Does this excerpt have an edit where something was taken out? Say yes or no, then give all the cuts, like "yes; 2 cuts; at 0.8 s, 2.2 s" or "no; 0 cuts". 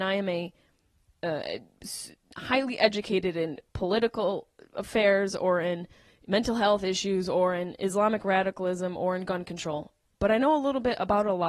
no; 0 cuts